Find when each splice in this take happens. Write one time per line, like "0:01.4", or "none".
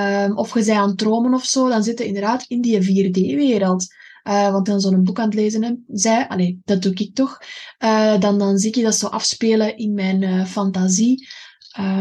0:04.7